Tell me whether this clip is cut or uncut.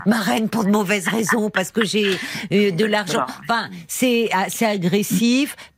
uncut